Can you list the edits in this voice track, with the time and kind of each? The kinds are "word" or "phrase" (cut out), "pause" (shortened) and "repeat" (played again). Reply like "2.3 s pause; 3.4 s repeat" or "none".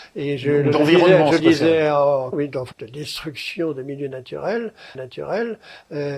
1.4 s phrase; 2.3 s word; 2.7 s word; 4.9 s repeat